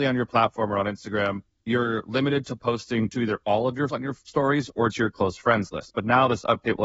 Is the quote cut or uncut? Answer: cut